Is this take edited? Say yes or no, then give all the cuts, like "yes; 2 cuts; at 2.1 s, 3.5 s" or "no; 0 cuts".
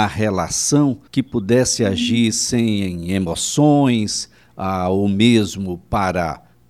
yes; 1 cut; at 1.1 s